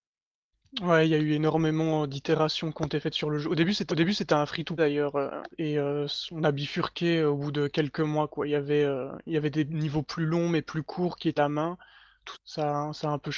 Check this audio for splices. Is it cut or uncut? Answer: cut